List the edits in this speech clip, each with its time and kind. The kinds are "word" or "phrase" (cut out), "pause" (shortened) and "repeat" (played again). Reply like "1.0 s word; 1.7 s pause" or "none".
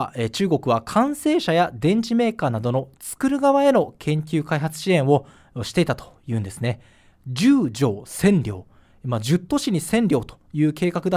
none